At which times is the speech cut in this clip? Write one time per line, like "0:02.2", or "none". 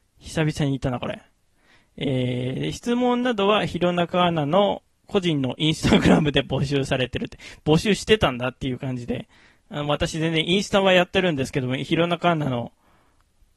none